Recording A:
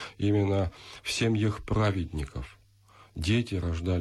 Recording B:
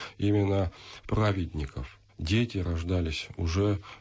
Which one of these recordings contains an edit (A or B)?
B